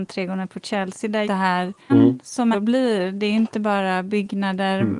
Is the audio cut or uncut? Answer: cut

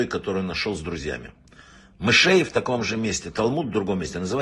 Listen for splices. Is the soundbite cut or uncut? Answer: uncut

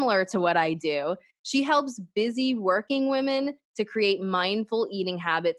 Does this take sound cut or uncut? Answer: uncut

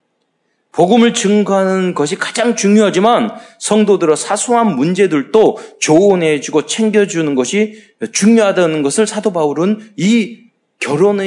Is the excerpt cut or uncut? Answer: uncut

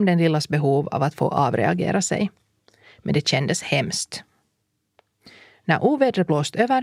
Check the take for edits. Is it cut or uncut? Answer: uncut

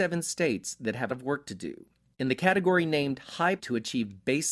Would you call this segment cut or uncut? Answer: cut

